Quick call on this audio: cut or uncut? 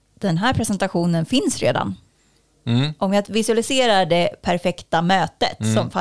uncut